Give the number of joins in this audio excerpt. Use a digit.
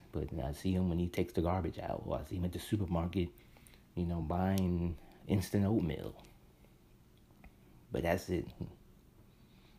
0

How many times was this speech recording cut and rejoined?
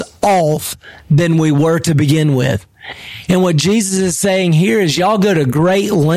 1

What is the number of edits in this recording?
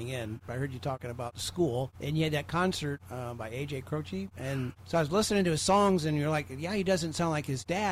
2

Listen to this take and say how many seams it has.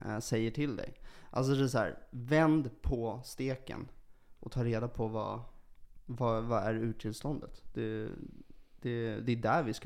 0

